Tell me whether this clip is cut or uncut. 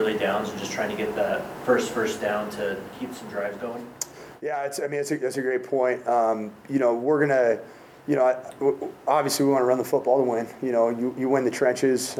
uncut